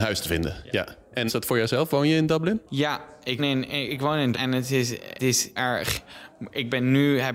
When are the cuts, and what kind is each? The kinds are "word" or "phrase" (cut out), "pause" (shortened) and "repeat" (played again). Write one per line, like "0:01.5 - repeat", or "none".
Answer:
0:01.3 - word
0:02.7 - pause
0:03.4 - word
0:04.3 - word
0:05.2 - word
0:05.6 - word